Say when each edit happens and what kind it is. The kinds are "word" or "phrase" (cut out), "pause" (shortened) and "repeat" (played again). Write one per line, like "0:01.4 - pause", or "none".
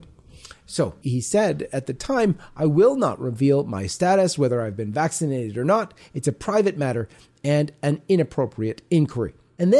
0:01.0 - word